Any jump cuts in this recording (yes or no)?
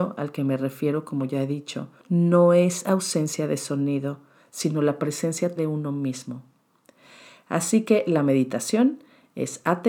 yes